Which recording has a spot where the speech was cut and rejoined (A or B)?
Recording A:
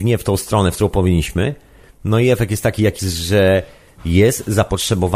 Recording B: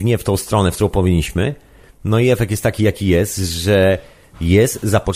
A